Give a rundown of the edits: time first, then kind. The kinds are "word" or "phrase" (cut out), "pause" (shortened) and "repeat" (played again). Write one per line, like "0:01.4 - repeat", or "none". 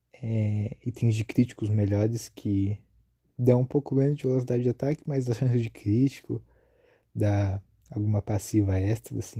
none